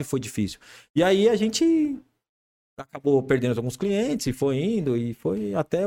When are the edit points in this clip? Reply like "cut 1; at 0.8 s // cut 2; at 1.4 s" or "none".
none